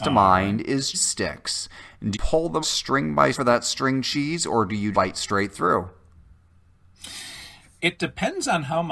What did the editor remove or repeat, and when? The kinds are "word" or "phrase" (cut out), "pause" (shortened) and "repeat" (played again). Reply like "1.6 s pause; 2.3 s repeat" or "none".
0.9 s word; 2.1 s word; 2.6 s word; 3.3 s word; 4.9 s word